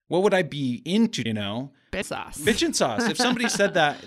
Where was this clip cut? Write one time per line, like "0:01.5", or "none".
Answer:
0:01.3
0:02.0

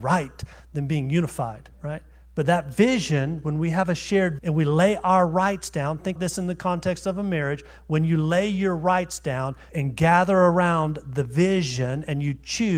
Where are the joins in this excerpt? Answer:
0:01.7
0:04.4
0:06.2
0:09.7

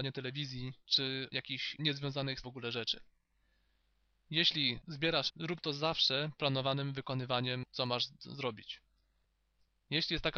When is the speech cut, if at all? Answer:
0:01.3
0:01.8
0:02.4
0:05.3
0:06.4
0:07.6

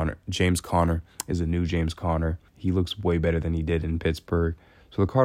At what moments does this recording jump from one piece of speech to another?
0:02.5

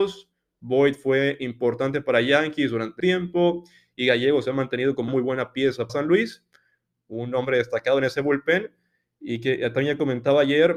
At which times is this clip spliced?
0:03.0
0:05.1
0:05.9

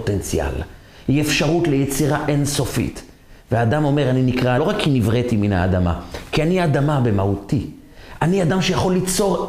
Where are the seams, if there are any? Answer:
0:04.6

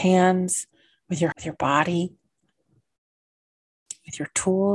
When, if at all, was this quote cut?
0:01.3

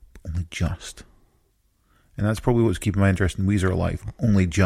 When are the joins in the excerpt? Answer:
none

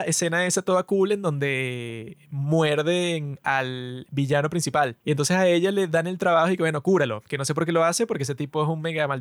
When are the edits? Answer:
0:05.0

